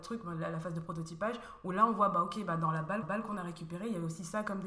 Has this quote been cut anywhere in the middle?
yes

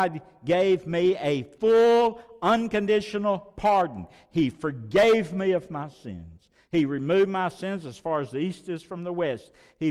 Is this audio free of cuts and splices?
yes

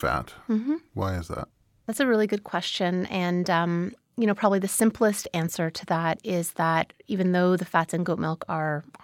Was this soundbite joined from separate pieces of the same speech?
no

